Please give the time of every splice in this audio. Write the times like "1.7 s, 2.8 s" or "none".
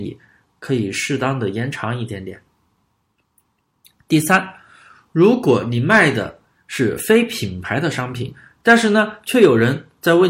none